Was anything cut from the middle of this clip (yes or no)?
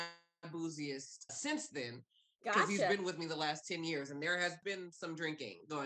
yes